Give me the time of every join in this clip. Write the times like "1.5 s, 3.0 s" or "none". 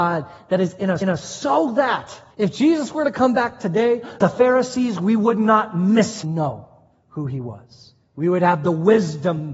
1.0 s, 2.3 s, 4.2 s, 6.2 s